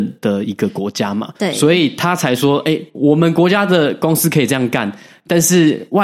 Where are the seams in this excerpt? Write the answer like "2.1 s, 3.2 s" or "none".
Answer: 1.4 s